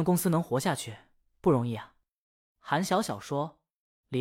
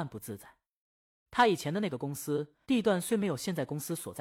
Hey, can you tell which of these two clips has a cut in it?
second; 1 cut; at 2.6 s

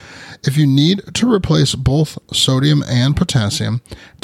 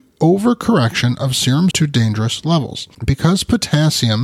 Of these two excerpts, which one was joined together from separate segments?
second; 2 cuts; at 1.7 s, 2.9 s

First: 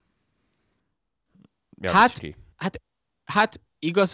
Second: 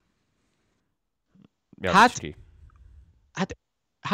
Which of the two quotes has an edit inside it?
first; 1 cut; at 2.5 s

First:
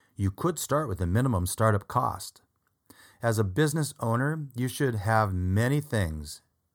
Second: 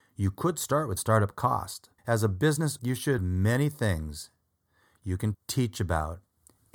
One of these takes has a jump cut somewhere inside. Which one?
second; 5 cuts; at 1.0 s, 2.0 s, 2.8 s, 3.2 s, 5.3 s

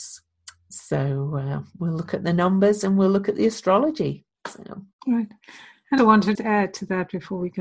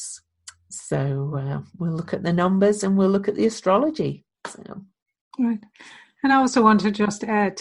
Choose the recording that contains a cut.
first; 3 cuts; at 4.9 s, 6.0 s, 6.3 s

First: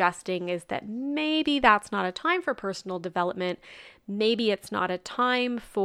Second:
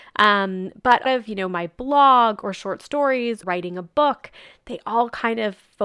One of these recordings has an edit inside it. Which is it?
second; 2 cuts; at 1.1 s, 3.4 s

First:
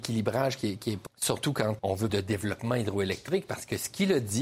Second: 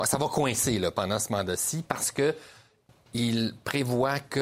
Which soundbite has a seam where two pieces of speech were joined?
first; 3 cuts; at 1.1 s, 1.8 s, 2.1 s

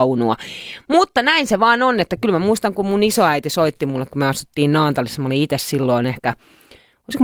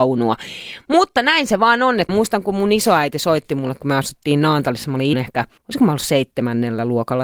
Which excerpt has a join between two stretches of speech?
second; 3 cuts; at 2.1 s, 5.1 s, 5.6 s

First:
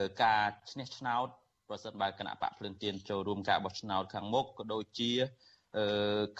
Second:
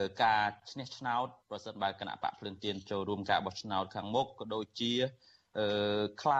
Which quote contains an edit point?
second; 1 cut; at 1.4 s

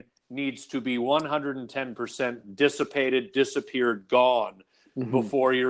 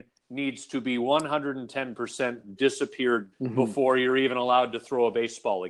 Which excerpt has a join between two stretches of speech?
second; 2 cuts; at 2.6 s, 3.3 s

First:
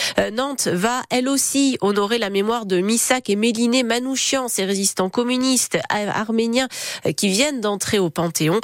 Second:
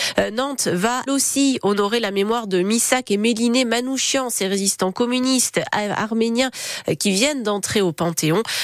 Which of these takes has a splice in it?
second; 1 cut; at 1.1 s

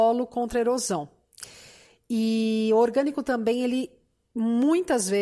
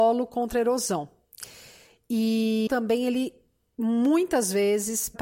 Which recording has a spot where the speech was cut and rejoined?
second; 1 cut; at 2.7 s

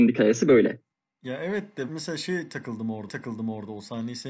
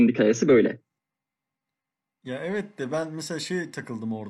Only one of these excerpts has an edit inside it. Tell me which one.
first; 3 cuts; at 0.9 s, 1.9 s, 3.1 s

